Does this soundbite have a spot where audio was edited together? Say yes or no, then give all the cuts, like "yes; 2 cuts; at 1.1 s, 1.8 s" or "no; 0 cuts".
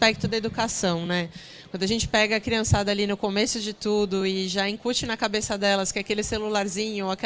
no; 0 cuts